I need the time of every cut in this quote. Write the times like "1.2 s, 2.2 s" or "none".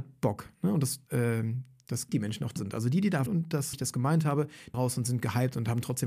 1.1 s, 2.1 s, 2.6 s, 3.3 s, 3.7 s, 4.7 s